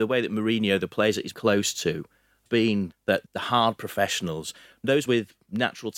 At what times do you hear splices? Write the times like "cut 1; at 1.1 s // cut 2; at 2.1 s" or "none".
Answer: cut 1; at 1.3 s // cut 2; at 2.5 s // cut 3; at 2.9 s // cut 4; at 3.3 s // cut 5; at 5.1 s